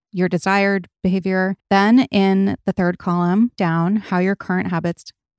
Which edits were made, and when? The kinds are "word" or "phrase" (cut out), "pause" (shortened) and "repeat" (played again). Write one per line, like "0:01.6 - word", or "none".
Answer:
0:01.6 - pause
0:03.6 - word